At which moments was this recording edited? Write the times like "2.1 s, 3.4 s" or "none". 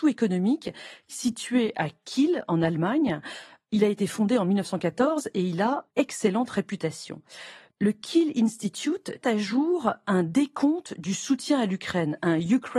5.9 s, 9.2 s

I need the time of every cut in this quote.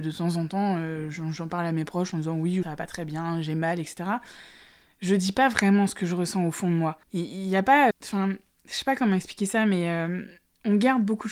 2.6 s, 7.0 s, 7.9 s

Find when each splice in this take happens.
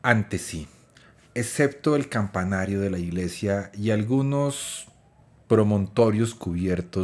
none

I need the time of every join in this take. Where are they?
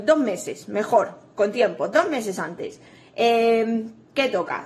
none

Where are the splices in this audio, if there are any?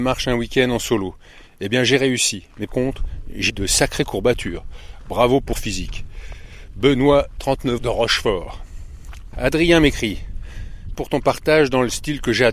2.7 s, 3.5 s, 5.5 s, 7.8 s, 10.9 s

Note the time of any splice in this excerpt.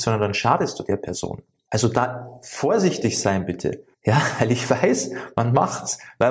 3.9 s

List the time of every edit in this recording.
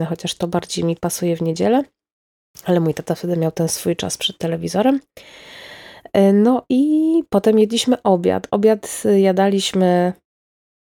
none

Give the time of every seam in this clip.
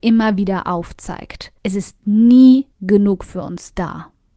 1.6 s, 2.7 s

